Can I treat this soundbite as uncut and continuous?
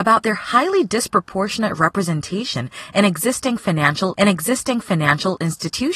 no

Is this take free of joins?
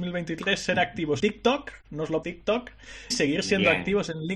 no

